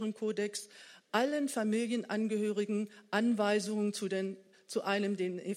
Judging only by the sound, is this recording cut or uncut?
uncut